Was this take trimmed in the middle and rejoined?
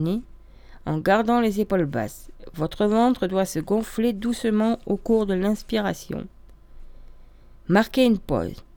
no; 0 cuts

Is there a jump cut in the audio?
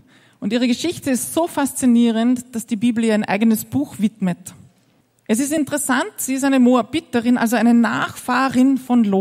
yes; 1 cut; at 5.0 s

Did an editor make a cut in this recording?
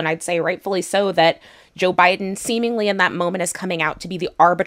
no; 0 cuts

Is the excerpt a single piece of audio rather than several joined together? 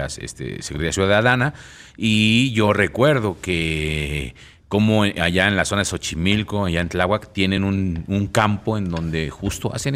yes; 0 cuts

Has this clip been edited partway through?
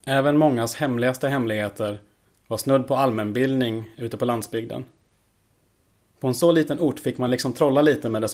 no; 0 cuts

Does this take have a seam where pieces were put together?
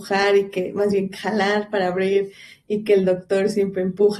no; 0 cuts

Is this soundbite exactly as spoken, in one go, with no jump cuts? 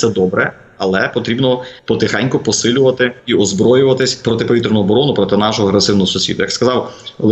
no; 2 cuts; at 1.8 s, 3.2 s

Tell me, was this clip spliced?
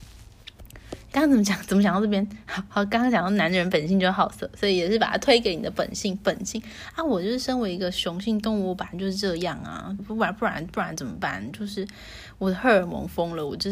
yes; 2 cuts; at 1.1 s, 10.0 s

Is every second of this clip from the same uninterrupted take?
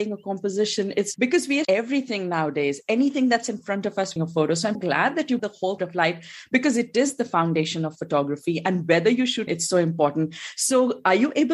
no; 7 cuts; at 1.1 s, 1.6 s, 4.2 s, 4.7 s, 5.4 s, 5.8 s, 9.5 s

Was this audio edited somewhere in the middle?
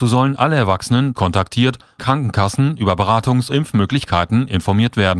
yes; 3 cuts; at 1.1 s, 2.0 s, 3.5 s

